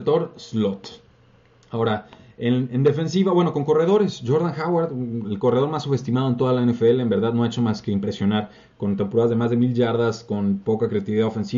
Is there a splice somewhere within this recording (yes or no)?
no